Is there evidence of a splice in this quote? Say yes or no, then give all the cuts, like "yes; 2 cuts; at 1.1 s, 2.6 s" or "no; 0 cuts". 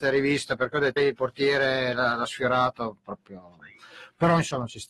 yes; 1 cut; at 1.0 s